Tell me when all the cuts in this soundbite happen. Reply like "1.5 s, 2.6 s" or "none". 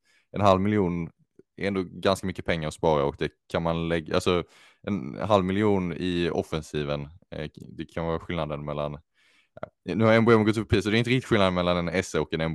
none